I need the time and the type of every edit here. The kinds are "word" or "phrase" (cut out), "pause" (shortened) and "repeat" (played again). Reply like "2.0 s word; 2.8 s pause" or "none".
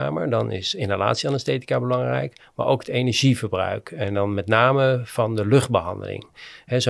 none